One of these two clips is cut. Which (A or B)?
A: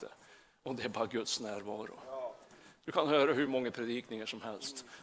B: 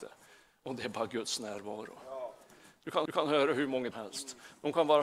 B